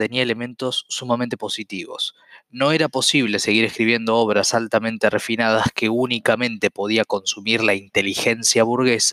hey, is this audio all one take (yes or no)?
yes